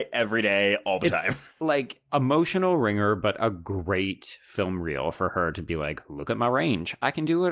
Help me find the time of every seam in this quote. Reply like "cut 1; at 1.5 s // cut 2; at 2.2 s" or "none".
cut 1; at 1.5 s